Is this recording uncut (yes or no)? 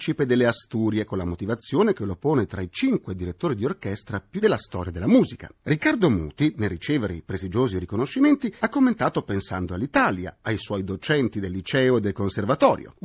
no